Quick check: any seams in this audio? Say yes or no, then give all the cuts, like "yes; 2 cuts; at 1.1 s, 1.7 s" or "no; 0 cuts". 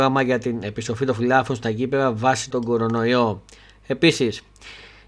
yes; 1 cut; at 2.5 s